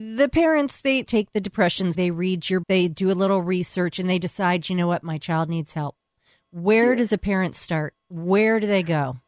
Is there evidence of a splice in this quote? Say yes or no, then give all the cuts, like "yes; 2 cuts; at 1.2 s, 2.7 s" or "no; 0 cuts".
yes; 3 cuts; at 1.0 s, 1.9 s, 2.6 s